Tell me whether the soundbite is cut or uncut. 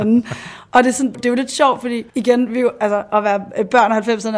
cut